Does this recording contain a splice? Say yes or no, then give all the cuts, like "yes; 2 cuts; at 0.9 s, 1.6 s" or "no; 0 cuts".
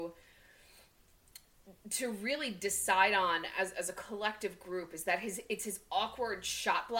no; 0 cuts